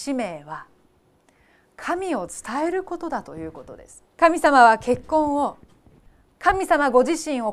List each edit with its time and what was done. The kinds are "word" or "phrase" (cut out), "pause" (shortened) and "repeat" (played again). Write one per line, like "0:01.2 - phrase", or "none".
0:04.1 - pause